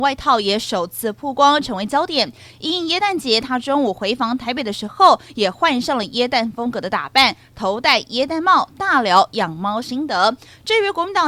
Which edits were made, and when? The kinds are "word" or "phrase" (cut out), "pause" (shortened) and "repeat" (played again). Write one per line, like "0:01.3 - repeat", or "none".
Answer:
none